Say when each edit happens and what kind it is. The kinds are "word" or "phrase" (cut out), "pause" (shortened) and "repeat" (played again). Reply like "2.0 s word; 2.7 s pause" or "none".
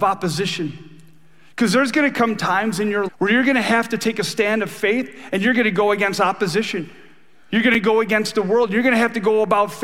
3.1 s word

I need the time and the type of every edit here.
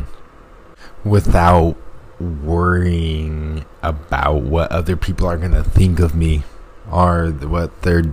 6.8 s pause

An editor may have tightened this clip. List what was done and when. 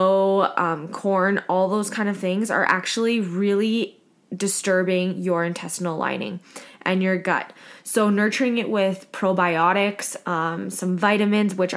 none

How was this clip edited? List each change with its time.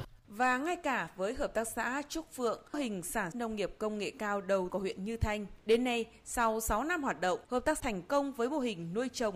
2.7 s word; 3.3 s word; 4.7 s word; 5.6 s pause; 7.4 s pause; 7.8 s phrase

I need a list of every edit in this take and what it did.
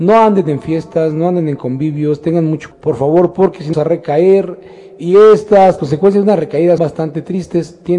2.7 s word; 3.7 s word; 5.8 s word; 6.8 s word

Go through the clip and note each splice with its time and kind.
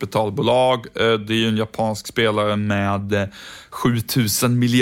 none

